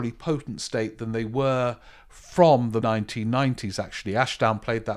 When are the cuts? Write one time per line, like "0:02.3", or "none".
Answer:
0:02.8